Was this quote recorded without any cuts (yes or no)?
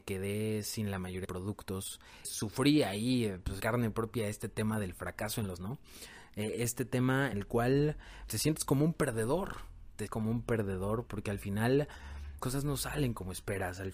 no